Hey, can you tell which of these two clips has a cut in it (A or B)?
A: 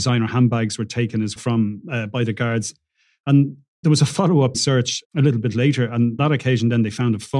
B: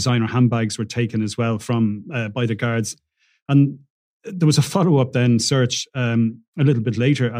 A